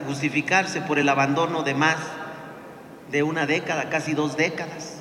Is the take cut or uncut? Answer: uncut